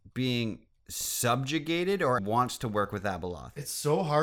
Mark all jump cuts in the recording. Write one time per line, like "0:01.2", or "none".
0:02.2